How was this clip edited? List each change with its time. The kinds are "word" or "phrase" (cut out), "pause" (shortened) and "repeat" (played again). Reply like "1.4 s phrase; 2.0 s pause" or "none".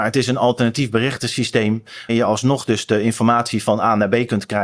2.1 s word